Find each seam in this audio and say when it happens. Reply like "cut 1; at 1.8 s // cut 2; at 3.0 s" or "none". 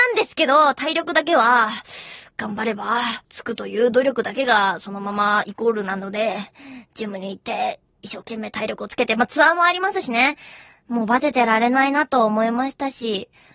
cut 1; at 3.2 s